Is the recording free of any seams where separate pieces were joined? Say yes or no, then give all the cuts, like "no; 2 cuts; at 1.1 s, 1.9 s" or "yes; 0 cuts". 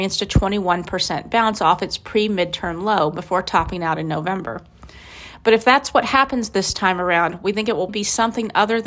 no; 1 cut; at 7.9 s